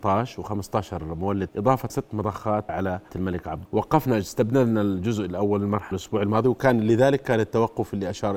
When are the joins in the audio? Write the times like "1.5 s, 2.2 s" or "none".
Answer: 1.5 s, 1.9 s, 2.7 s, 3.1 s, 3.7 s, 5.9 s